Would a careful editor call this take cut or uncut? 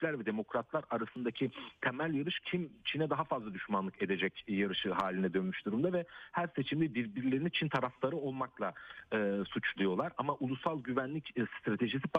uncut